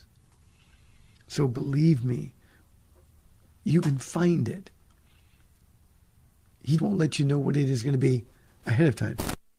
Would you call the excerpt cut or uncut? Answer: cut